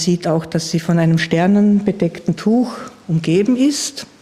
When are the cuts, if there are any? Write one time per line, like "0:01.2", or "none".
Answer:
none